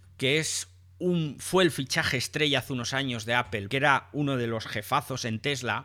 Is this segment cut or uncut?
cut